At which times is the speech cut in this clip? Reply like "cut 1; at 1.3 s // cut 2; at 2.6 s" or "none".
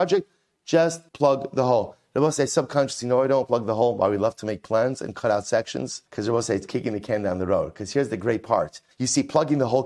cut 1; at 1.1 s // cut 2; at 6.1 s // cut 3; at 8.9 s